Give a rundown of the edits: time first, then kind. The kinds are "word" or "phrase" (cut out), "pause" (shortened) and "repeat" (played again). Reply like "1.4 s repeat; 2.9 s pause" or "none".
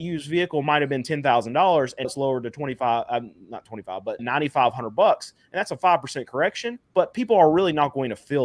2.0 s word; 4.2 s word; 6.8 s pause